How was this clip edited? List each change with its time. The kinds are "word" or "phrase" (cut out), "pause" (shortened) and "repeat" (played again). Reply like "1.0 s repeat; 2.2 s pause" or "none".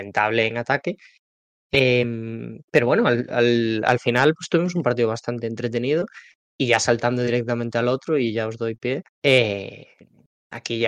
9.1 s pause

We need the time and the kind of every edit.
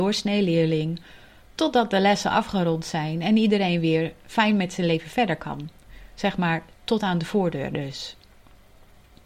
none

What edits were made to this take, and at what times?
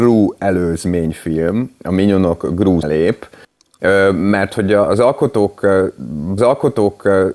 2.8 s word; 6.4 s repeat

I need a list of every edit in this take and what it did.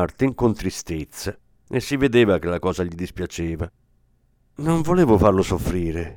none

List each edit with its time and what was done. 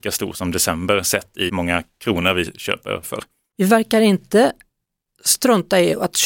1.5 s word; 3.0 s word

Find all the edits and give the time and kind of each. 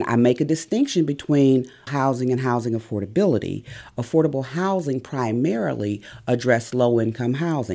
1.9 s word

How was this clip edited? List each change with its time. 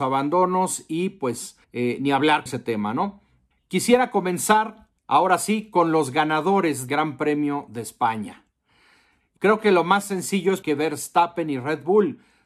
1.6 s pause; 2.5 s word; 3.5 s pause; 5.0 s pause; 6.9 s word; 9.4 s word; 10.6 s word

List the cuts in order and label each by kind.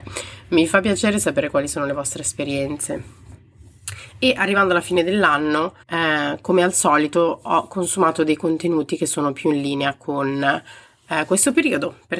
5.8 s pause

